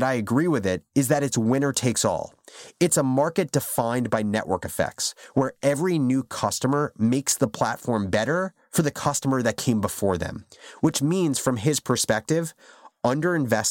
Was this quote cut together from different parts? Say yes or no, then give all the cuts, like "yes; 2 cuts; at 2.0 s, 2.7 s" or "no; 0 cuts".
no; 0 cuts